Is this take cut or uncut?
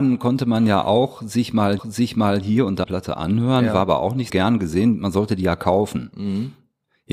cut